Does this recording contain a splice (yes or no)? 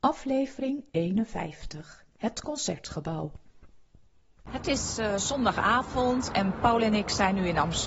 no